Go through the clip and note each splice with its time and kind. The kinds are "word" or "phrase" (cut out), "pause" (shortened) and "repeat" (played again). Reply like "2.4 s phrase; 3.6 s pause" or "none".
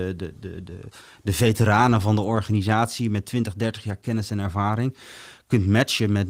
none

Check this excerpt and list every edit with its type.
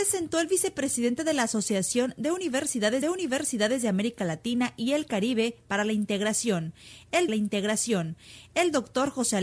3.0 s repeat; 7.3 s repeat

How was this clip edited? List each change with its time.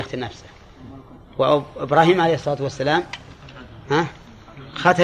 none

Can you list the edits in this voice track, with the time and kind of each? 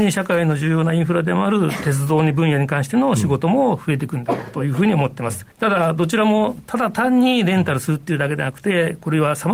5.5 s pause

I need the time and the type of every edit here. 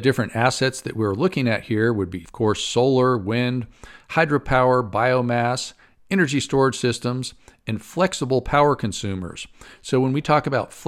none

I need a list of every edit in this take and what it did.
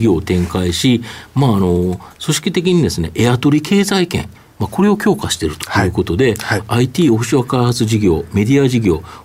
none

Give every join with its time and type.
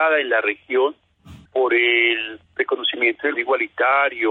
1.5 s pause; 2.5 s pause; 3.3 s word

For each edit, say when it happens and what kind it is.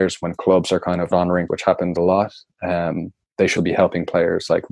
1.1 s word; 1.5 s word; 1.9 s word; 3.6 s word

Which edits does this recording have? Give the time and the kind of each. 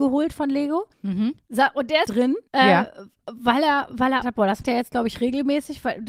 0.9 s pause; 2.1 s phrase; 2.5 s pause; 4.2 s phrase; 4.6 s word

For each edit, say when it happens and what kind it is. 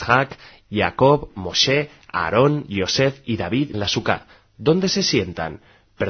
3.7 s word

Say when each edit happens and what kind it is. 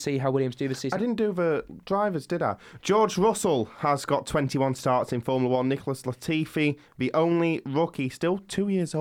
none

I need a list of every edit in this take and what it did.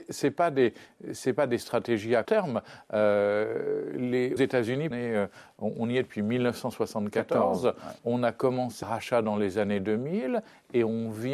2.3 s word; 4.4 s word; 4.9 s phrase; 8.0 s pause; 8.8 s word

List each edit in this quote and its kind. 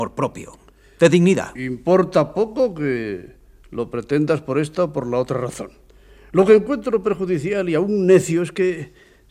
none

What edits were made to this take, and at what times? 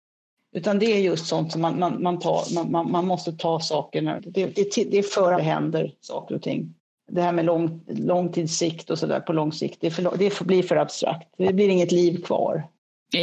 4.2 s word; 5.4 s phrase; 6.9 s pause

